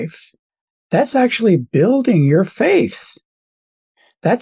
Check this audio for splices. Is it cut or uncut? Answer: uncut